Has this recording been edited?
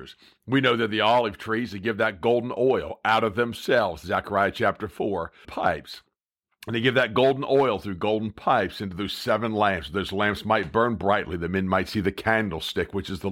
yes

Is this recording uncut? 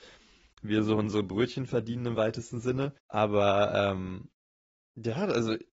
no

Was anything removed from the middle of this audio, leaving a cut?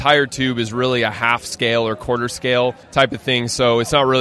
yes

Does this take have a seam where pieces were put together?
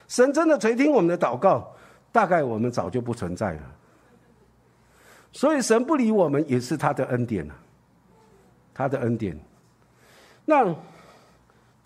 no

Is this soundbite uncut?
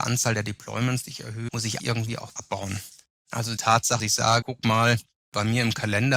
no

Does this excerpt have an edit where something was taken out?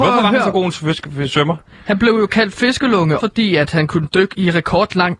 yes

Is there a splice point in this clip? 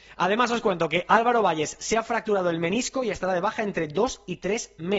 no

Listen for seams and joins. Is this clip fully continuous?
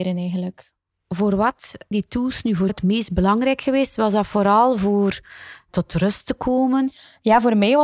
no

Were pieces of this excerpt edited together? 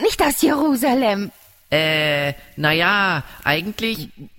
no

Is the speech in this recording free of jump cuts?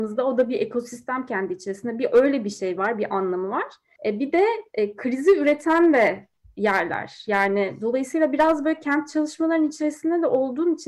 yes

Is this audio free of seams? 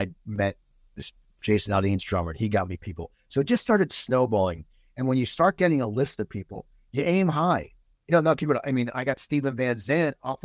yes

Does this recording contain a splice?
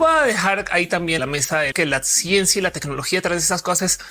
yes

